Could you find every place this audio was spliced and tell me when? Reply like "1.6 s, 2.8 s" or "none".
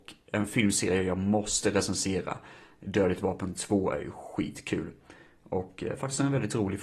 none